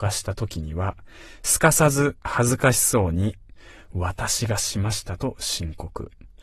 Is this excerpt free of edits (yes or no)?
yes